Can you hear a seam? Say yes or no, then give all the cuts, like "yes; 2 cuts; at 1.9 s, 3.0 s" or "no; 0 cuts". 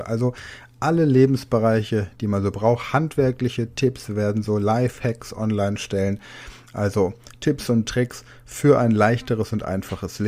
no; 0 cuts